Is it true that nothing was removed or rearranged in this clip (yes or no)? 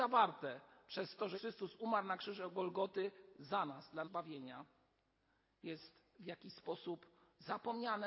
no